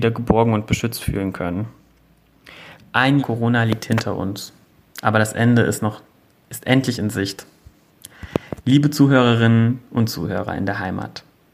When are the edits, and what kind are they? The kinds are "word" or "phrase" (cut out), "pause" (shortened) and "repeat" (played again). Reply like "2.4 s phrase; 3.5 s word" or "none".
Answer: 3.2 s word

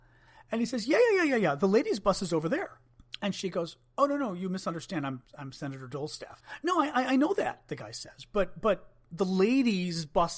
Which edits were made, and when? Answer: none

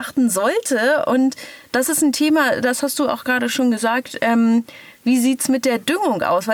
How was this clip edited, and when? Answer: none

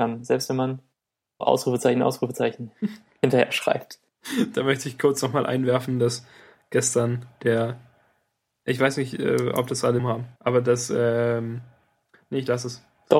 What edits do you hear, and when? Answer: 1.4 s word; 10.0 s word; 10.4 s pause

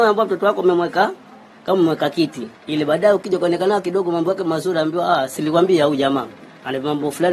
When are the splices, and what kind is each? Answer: 2.6 s pause

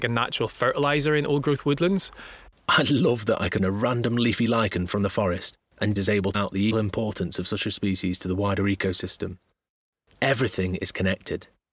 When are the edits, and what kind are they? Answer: 3.6 s word; 6.0 s word; 6.3 s word; 6.7 s word

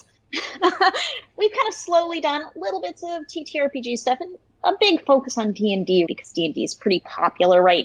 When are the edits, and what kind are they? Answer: 1.3 s word; 6.1 s word

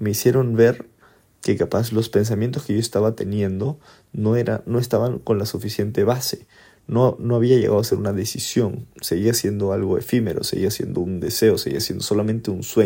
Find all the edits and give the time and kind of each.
none

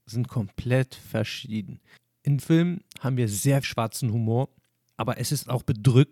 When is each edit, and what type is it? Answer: 2.4 s word; 3.6 s word

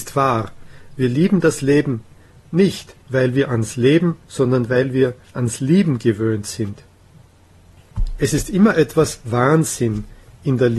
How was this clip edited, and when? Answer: 3.0 s pause; 4.2 s pause

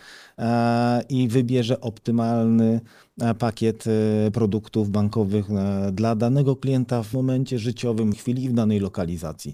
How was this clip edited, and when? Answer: 7.1 s word; 8.1 s word

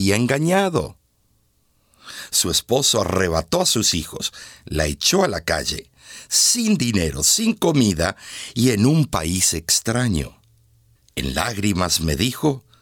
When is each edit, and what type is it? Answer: 11.0 s pause

